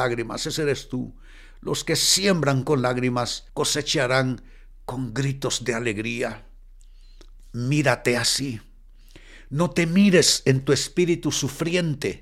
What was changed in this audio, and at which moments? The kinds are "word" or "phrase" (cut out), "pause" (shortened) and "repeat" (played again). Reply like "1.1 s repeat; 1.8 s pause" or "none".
3.5 s pause